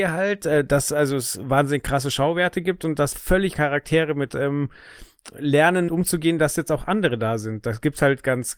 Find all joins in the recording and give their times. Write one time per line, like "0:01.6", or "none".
0:03.1
0:03.5
0:04.3
0:05.9